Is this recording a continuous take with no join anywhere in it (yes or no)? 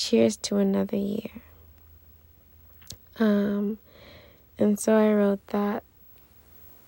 yes